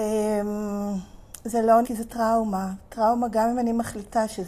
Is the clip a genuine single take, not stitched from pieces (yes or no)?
no